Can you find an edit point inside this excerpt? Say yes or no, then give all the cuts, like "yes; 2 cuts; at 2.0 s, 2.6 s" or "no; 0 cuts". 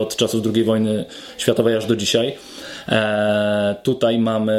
no; 0 cuts